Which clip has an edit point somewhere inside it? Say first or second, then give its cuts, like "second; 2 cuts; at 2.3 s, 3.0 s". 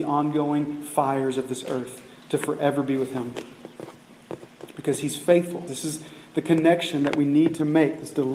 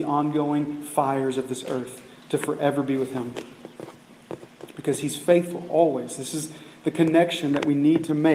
first; 1 cut; at 5.7 s